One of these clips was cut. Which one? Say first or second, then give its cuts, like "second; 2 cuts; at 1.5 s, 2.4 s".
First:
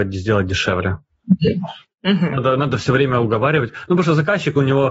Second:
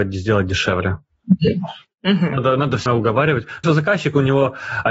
second; 2 cuts; at 2.9 s, 3.6 s